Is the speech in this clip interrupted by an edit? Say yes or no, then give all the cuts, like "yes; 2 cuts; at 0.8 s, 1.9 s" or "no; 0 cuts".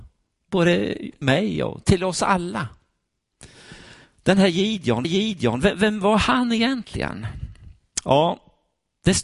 yes; 2 cuts; at 1.2 s, 5.0 s